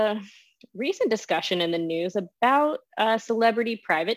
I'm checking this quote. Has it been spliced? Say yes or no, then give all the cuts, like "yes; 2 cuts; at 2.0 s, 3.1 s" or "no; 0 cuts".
no; 0 cuts